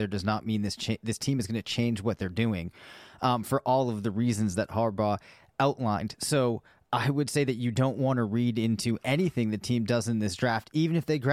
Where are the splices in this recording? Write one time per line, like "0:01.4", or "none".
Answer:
none